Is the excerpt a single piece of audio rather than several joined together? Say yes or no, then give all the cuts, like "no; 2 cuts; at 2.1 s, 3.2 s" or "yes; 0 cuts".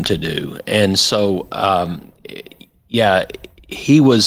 yes; 0 cuts